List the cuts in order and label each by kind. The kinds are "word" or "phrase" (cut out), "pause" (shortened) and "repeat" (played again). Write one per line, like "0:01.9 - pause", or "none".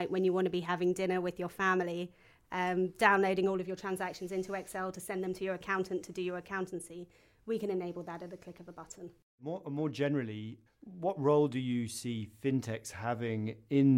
0:10.7 - word